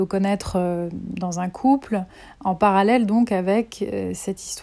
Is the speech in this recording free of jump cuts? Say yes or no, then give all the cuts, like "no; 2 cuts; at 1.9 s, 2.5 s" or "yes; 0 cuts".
yes; 0 cuts